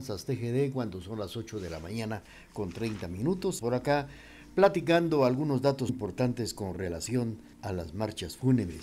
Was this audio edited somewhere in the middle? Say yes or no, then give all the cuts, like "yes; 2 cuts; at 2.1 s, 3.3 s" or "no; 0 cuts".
yes; 3 cuts; at 3.6 s, 5.9 s, 7.5 s